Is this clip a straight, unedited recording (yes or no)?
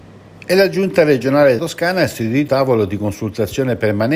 no